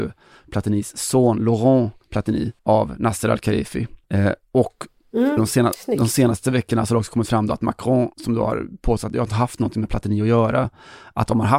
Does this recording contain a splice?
yes; 4 cuts; at 2.6 s, 4.0 s, 5.4 s, 8.1 s

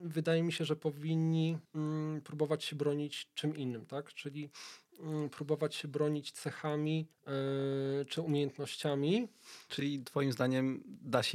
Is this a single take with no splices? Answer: no; 2 cuts; at 1.6 s, 7.1 s

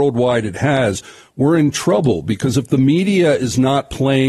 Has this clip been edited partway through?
no; 0 cuts

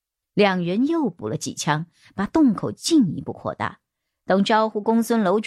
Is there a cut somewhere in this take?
no; 0 cuts

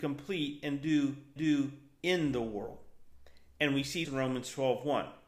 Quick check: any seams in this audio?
yes; 2 cuts; at 1.4 s, 4.0 s

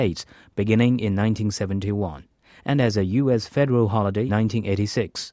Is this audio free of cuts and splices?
no; 1 cut; at 4.3 s

